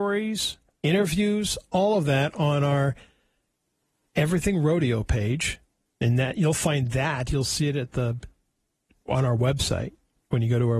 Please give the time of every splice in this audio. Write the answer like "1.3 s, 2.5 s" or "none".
none